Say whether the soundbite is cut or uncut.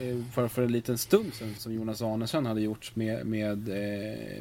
cut